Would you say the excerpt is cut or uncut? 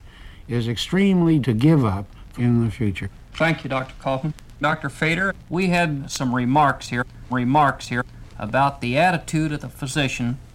cut